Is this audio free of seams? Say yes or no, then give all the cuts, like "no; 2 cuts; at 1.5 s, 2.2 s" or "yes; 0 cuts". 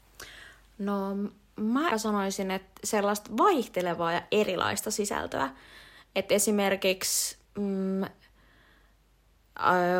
no; 2 cuts; at 1.9 s, 7.4 s